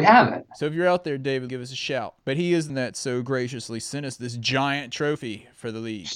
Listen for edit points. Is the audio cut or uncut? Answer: cut